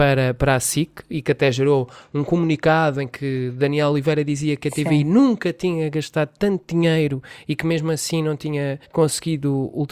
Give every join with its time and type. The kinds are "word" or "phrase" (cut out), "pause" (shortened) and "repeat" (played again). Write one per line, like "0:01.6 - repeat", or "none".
0:08.8 - pause